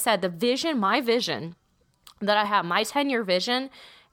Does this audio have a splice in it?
no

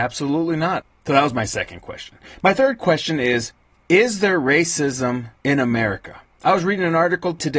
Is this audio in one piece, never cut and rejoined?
no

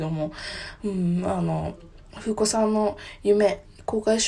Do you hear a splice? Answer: no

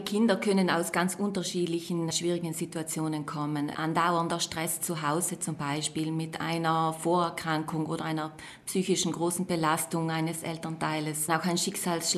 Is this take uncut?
no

